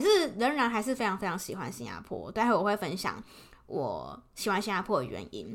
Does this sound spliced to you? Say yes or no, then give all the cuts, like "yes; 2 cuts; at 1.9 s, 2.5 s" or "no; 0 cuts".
no; 0 cuts